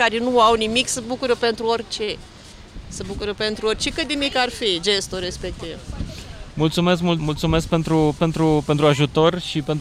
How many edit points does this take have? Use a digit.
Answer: 2